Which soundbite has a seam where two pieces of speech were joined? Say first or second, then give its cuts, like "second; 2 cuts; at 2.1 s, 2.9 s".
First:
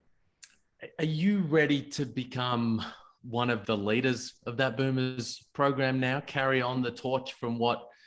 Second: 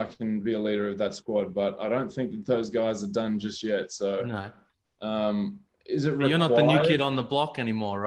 first; 1 cut; at 3.6 s